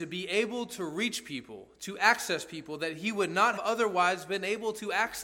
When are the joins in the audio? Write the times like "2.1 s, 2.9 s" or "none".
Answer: 3.6 s